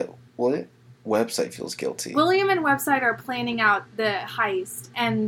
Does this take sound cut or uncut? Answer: uncut